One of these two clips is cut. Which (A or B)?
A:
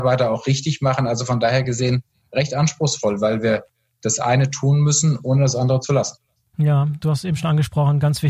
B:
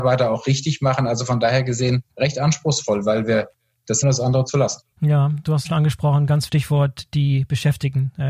B